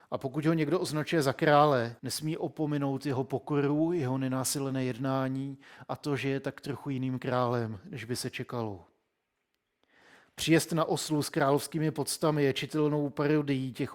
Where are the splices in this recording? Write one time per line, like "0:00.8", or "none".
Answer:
0:02.0